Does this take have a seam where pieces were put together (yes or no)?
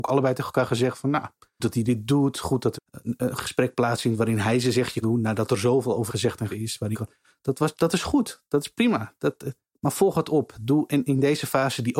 yes